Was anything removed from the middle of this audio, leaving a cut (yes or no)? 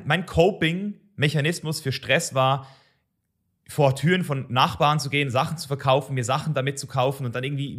no